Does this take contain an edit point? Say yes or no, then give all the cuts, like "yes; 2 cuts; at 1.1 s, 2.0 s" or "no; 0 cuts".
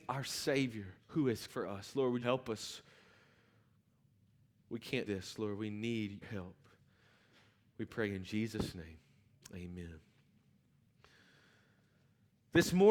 yes; 5 cuts; at 1.0 s, 1.5 s, 2.2 s, 5.1 s, 6.2 s